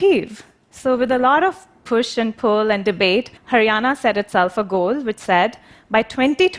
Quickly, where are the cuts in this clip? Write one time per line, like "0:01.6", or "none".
0:03.4